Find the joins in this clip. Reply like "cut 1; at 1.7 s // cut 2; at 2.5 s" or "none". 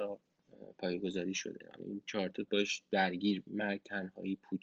cut 1; at 2.5 s // cut 2; at 3.5 s